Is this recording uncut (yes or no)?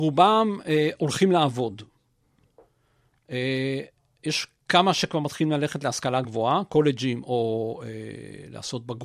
yes